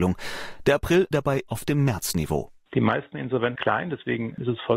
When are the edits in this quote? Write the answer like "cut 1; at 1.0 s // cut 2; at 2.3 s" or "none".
cut 1; at 1.1 s // cut 2; at 1.5 s // cut 3; at 3.6 s